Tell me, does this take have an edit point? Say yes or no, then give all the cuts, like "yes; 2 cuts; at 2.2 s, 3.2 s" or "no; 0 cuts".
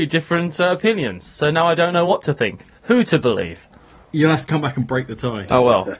no; 0 cuts